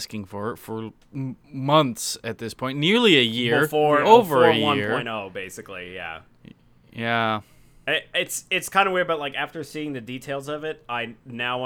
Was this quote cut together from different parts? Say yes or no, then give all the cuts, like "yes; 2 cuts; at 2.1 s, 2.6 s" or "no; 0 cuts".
no; 0 cuts